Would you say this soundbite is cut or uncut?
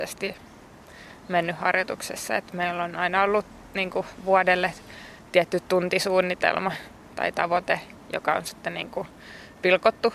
uncut